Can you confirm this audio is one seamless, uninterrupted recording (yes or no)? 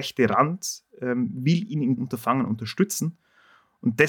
no